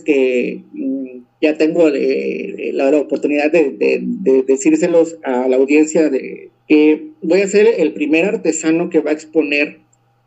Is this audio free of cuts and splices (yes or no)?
no